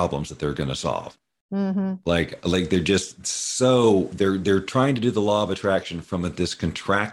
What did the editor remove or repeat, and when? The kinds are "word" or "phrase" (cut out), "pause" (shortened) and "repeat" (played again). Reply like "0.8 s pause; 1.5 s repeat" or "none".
none